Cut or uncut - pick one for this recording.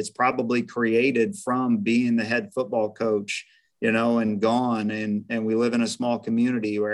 uncut